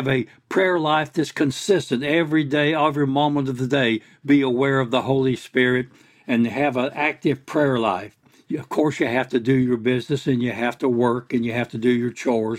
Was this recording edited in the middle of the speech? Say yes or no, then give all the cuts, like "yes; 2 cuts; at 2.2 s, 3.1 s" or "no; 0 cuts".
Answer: no; 0 cuts